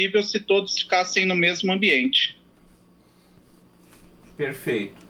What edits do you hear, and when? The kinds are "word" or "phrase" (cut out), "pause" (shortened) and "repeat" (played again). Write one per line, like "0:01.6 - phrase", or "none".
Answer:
none